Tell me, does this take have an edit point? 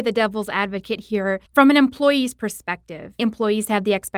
yes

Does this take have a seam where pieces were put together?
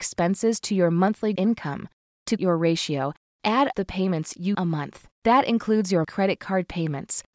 yes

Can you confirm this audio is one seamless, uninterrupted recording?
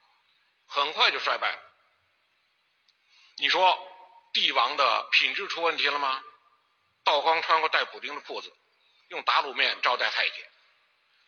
yes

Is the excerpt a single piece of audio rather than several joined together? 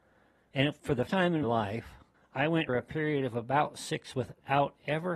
no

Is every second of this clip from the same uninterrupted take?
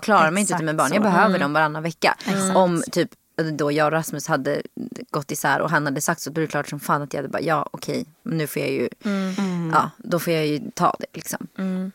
yes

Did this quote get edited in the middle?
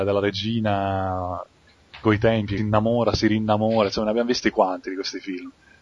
yes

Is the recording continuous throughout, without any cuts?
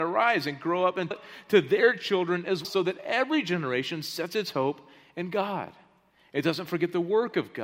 no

